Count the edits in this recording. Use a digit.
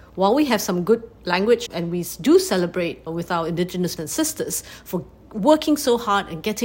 3